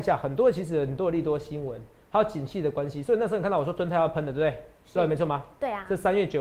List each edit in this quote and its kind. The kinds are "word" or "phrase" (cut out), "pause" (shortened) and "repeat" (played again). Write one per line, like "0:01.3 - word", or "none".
none